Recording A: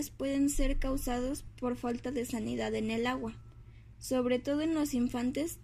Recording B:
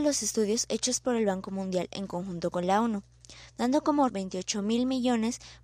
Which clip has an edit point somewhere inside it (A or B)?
B